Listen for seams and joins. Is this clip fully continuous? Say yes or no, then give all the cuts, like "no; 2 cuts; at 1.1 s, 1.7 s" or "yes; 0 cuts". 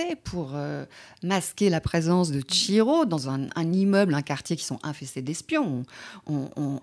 yes; 0 cuts